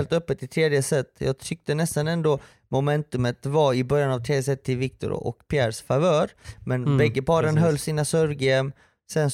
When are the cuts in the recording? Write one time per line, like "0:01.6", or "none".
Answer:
none

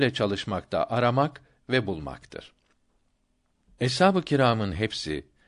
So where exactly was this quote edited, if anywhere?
none

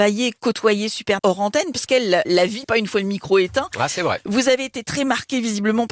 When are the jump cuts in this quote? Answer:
0:01.2
0:01.9
0:02.2
0:02.6

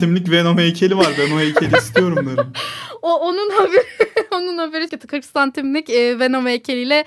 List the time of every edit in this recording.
0:04.9

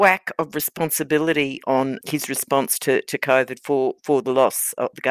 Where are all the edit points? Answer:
none

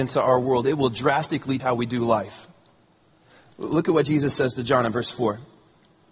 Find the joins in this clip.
0:01.6

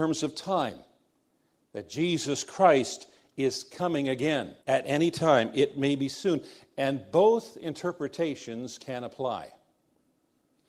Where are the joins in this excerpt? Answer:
0:04.6

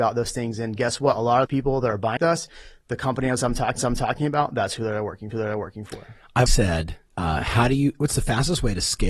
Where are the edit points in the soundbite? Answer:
0:01.5
0:02.2
0:03.8
0:05.3
0:06.5
0:07.1

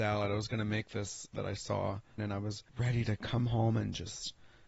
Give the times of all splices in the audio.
0:01.3
0:02.2
0:02.7

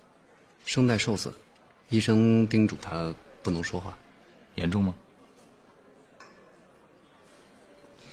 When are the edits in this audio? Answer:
none

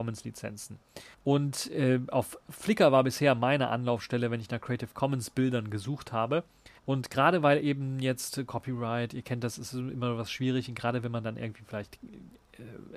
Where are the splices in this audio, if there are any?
0:01.1
0:06.8

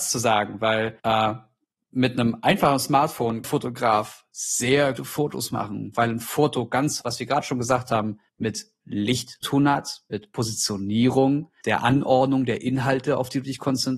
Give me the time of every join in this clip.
0:01.0
0:03.4
0:05.0
0:07.0
0:08.3
0:09.4
0:11.6

